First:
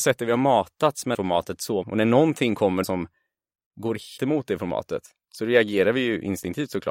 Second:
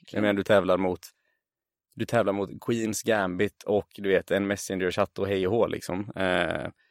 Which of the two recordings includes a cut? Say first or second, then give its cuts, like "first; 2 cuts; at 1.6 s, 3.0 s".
first; 4 cuts; at 1.1 s, 1.8 s, 2.8 s, 4.2 s